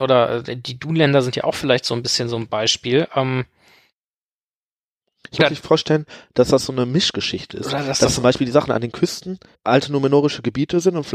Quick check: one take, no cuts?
no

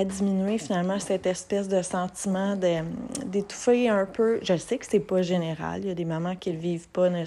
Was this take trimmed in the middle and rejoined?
no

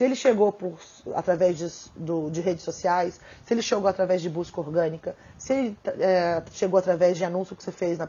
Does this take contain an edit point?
no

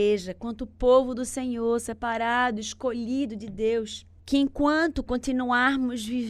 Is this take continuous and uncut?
yes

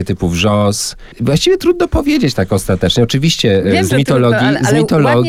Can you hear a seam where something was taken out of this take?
no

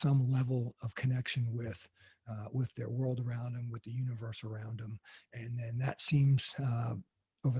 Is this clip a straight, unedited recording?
yes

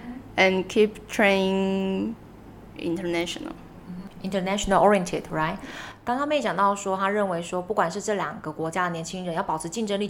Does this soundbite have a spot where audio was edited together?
yes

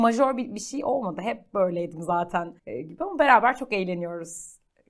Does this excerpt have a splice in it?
yes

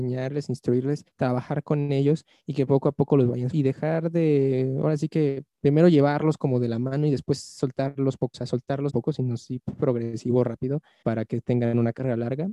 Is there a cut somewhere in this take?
yes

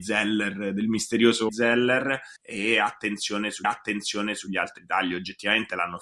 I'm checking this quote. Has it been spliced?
yes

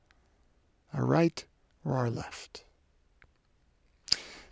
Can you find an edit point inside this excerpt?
no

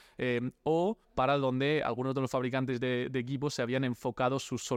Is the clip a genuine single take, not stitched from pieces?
no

